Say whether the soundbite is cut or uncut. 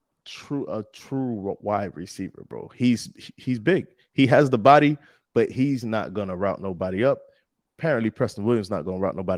uncut